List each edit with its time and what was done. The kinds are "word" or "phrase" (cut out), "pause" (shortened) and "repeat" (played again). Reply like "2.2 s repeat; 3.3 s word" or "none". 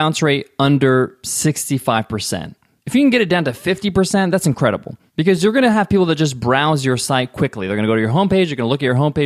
none